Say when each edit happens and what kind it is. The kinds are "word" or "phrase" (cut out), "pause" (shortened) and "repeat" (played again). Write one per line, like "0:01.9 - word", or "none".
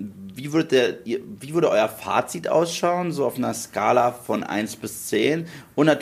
none